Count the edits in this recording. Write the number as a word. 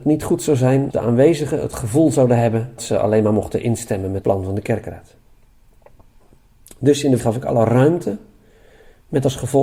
four